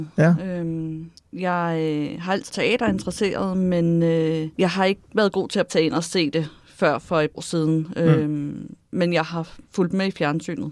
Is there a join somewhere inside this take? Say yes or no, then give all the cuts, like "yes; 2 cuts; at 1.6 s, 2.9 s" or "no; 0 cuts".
yes; 6 cuts; at 1.2 s, 2.5 s, 4.5 s, 5.1 s, 5.7 s, 7.3 s